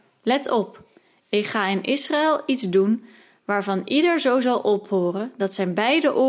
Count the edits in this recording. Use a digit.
0